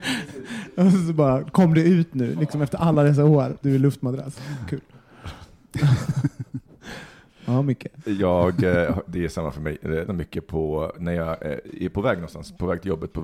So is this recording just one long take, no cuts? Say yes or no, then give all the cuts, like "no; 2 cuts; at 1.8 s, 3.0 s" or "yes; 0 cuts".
no; 2 cuts; at 3.6 s, 10.1 s